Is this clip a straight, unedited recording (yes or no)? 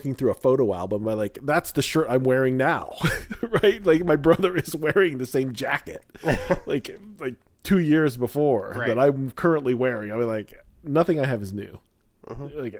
yes